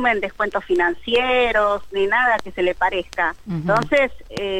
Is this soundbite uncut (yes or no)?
yes